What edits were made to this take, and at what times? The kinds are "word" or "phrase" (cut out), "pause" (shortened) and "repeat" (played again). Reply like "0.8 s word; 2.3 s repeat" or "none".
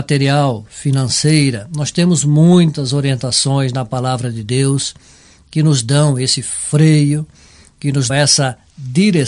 8.1 s word